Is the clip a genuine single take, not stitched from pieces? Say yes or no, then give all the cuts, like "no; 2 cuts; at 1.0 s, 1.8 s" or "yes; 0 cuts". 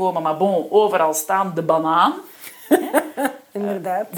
yes; 0 cuts